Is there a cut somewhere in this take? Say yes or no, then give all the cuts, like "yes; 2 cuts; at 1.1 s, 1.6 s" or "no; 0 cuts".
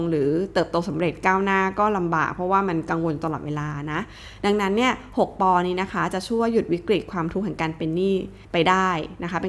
yes; 1 cut; at 8.4 s